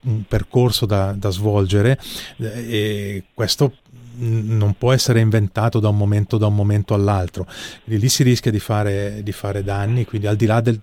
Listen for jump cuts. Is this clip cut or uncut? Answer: cut